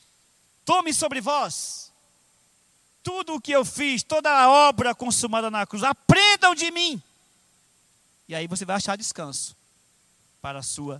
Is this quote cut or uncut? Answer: uncut